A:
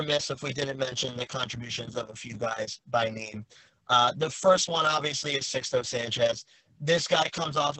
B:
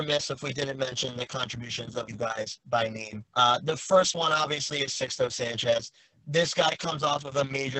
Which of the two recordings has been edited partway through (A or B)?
B